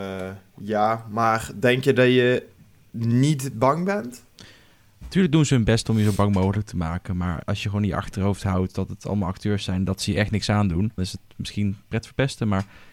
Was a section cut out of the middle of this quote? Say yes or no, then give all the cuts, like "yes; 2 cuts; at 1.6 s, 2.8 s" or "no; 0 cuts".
yes; 2 cuts; at 7.4 s, 11.0 s